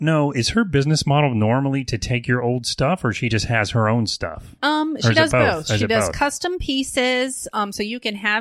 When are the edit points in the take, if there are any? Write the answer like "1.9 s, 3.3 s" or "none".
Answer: none

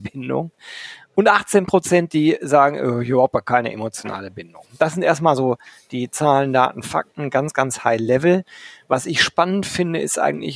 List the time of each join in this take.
none

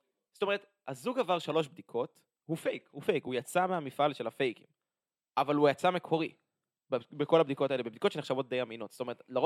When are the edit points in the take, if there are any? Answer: none

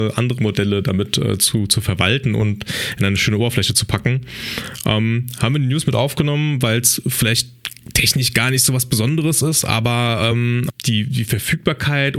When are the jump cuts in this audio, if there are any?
none

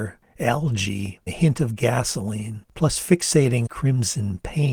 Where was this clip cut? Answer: 1.3 s, 2.6 s, 3.7 s

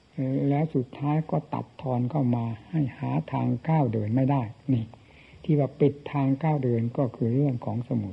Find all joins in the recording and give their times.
none

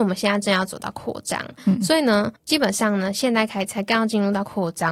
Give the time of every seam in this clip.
2.4 s

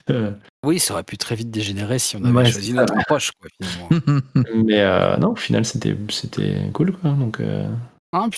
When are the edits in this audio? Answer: none

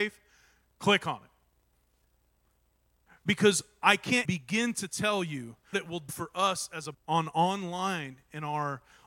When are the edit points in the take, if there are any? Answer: 4.2 s, 5.7 s, 6.1 s, 6.9 s

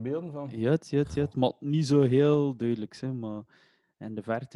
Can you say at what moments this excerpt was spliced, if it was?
none

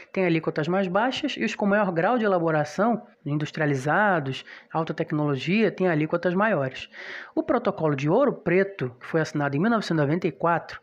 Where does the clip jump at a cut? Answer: 1.6 s, 3.1 s

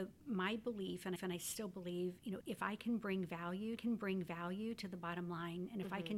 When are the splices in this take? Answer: 1.2 s, 2.4 s, 3.8 s

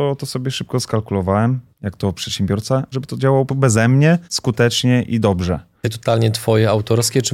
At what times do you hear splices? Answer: 1.7 s, 2.9 s, 3.5 s, 4.2 s, 5.8 s

